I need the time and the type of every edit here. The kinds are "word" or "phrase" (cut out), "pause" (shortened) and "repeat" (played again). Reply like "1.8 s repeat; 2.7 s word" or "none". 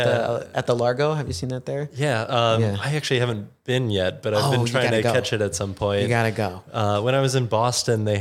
none